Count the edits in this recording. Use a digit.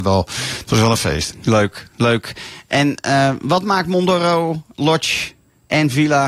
0